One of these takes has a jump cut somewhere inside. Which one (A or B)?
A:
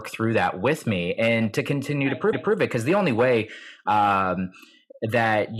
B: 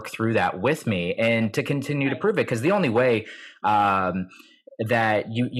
A